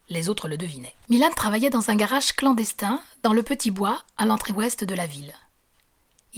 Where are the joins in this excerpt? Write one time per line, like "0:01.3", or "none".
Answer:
0:01.0